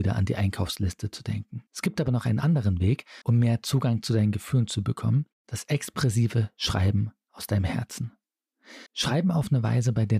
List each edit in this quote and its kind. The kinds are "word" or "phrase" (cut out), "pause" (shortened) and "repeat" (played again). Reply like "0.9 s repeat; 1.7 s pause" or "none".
1.7 s pause; 3.2 s pause; 5.3 s pause; 8.9 s pause